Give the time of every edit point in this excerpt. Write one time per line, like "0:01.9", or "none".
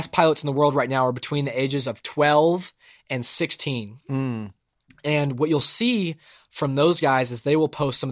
none